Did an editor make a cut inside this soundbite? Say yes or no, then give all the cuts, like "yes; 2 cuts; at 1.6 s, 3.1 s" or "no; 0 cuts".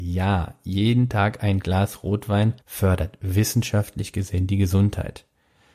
yes; 1 cut; at 2.6 s